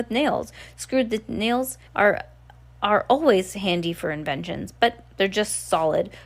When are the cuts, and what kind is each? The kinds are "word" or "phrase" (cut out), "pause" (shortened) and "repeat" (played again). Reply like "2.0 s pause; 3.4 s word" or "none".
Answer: 1.9 s pause